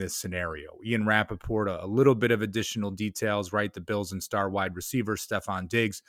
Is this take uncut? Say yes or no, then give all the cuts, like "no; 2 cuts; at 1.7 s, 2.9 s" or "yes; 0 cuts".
yes; 0 cuts